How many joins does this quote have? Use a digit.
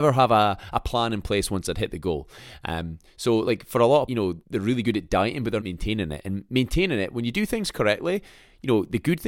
3